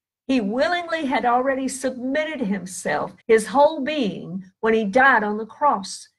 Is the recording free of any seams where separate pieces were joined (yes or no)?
no